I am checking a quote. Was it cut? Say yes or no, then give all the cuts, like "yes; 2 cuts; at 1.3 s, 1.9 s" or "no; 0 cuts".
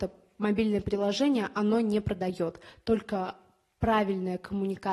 no; 0 cuts